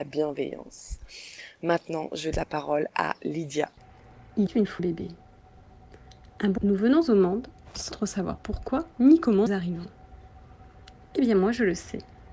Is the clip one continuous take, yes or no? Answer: no